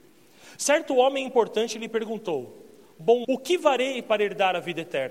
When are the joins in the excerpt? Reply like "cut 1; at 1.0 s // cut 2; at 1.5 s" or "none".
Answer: cut 1; at 3.2 s